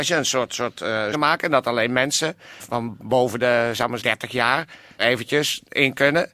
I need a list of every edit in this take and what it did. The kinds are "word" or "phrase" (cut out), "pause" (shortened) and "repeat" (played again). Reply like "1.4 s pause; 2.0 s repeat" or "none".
1.1 s phrase; 2.6 s word; 4.0 s word; 5.0 s word